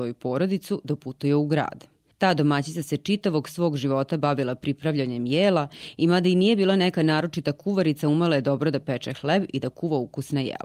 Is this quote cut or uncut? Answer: uncut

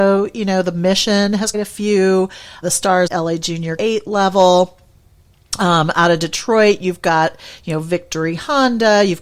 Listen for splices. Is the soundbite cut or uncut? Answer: cut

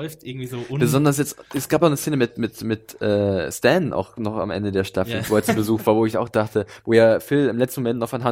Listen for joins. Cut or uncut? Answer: uncut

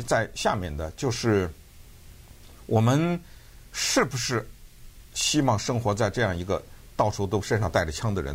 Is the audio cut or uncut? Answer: uncut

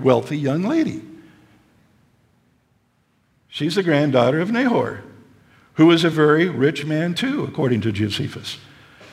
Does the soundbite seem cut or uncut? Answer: uncut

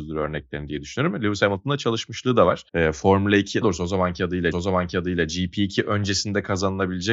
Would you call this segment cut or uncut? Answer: cut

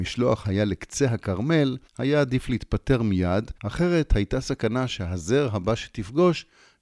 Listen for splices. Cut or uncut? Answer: cut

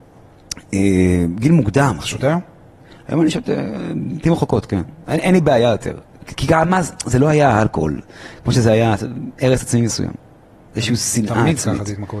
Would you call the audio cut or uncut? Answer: uncut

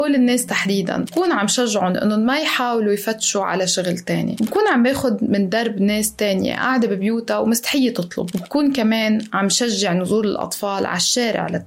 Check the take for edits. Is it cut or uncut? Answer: uncut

